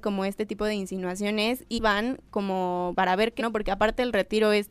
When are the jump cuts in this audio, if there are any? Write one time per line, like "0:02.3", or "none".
0:01.8
0:02.9
0:03.4